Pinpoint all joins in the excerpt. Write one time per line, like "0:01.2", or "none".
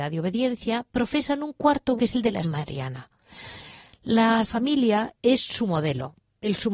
0:02.0
0:02.4
0:04.5